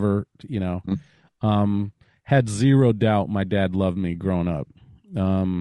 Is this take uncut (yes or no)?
yes